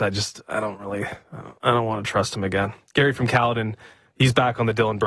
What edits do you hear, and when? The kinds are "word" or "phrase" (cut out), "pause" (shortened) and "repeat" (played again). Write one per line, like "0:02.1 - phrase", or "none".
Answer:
none